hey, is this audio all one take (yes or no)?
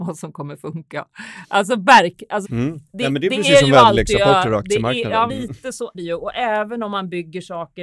no